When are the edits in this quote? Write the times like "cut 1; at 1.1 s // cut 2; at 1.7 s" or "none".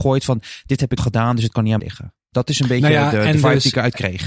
cut 1; at 1.0 s // cut 2; at 1.8 s